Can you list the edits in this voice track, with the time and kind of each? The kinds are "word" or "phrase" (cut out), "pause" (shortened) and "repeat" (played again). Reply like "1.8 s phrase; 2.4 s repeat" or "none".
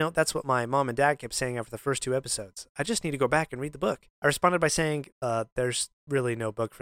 4.1 s pause; 5.1 s pause